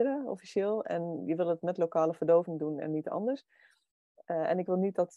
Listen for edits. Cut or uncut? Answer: uncut